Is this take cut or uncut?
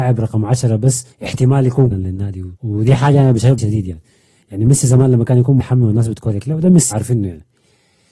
cut